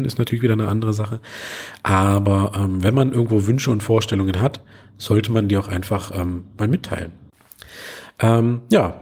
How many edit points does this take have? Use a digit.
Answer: 0